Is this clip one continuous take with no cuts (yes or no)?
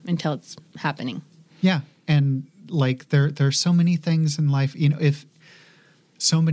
yes